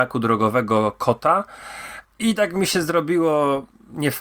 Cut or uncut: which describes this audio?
uncut